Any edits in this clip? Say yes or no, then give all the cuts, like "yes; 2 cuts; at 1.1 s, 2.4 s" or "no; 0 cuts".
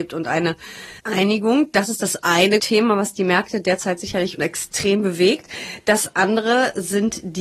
yes; 3 cuts; at 1.0 s, 2.6 s, 4.4 s